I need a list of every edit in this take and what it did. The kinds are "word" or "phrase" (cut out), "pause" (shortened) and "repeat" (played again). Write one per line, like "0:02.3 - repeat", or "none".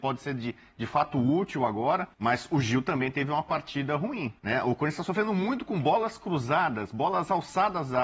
0:02.1 - pause
0:04.4 - pause